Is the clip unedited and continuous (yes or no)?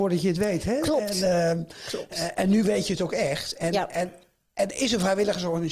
yes